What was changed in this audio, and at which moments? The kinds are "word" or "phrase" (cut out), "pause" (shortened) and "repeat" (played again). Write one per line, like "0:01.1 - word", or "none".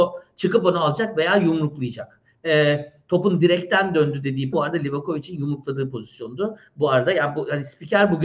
0:04.5 - word